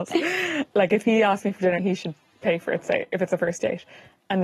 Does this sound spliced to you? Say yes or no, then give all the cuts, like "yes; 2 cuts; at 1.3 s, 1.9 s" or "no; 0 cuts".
yes; 1 cut; at 1.8 s